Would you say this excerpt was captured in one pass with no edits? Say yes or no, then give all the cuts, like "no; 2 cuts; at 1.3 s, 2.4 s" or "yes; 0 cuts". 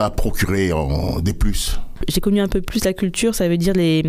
yes; 0 cuts